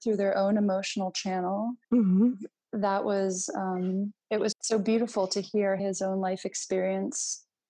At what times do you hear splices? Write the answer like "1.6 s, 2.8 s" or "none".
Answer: 1.8 s, 4.2 s, 4.5 s, 5.8 s

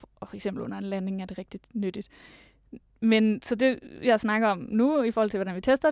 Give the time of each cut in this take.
none

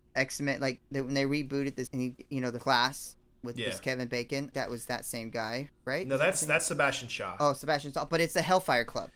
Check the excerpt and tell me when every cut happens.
1.9 s, 2.6 s, 4.5 s

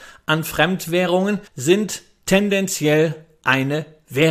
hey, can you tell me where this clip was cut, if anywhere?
1.5 s

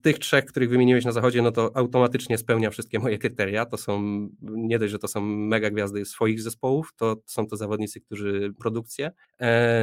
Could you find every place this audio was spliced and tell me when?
8.6 s

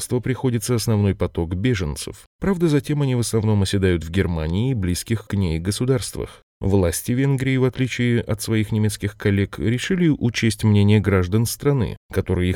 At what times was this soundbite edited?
none

